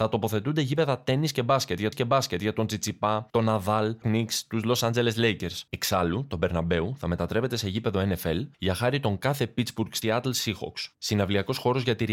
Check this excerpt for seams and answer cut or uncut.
cut